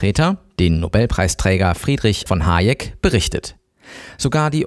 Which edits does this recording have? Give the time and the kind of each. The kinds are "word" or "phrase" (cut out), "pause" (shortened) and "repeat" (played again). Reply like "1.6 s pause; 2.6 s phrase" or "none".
2.3 s word